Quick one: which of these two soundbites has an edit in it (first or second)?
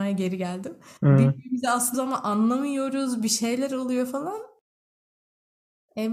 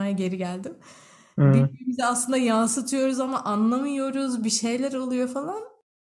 first